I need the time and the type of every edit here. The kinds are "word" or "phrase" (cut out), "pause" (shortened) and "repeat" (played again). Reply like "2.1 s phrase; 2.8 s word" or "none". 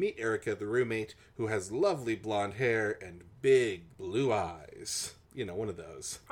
none